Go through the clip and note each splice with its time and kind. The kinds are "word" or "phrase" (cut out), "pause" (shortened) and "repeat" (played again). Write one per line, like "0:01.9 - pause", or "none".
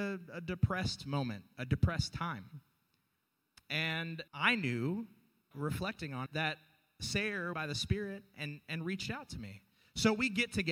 0:04.3 - pause
0:05.5 - word
0:06.3 - word
0:07.5 - phrase